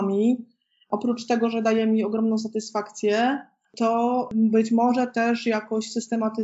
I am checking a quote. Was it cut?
no; 0 cuts

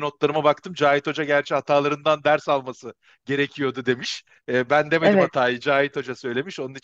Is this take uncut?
yes; 0 cuts

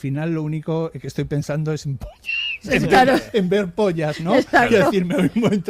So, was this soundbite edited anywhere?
no; 0 cuts

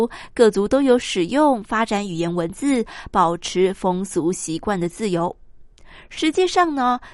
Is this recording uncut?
yes; 0 cuts

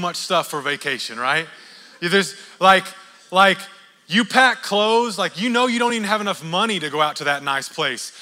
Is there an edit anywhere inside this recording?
no; 0 cuts

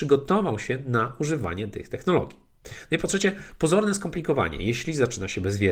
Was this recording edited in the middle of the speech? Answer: no; 0 cuts

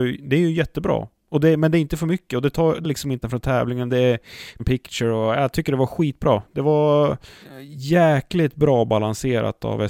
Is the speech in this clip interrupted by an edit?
yes; 3 cuts; at 2.8 s, 3.2 s, 4.6 s

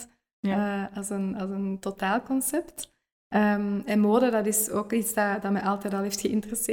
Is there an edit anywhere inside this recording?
no; 0 cuts

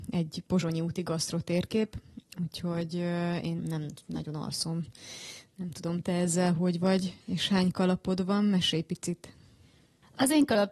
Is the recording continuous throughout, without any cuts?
no; 1 cut; at 3.6 s

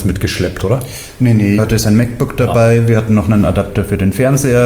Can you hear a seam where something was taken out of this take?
yes; 1 cut; at 1.6 s

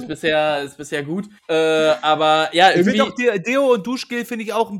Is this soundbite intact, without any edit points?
no; 1 cut; at 1.4 s

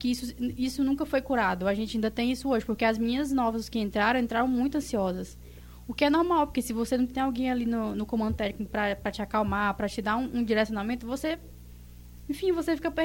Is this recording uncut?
yes; 0 cuts

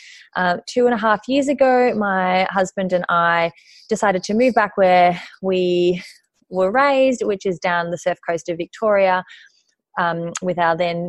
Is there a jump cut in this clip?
no; 0 cuts

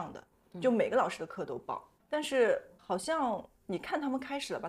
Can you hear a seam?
yes; 1 cut; at 3.5 s

